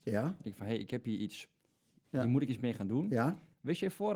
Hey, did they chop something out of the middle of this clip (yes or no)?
no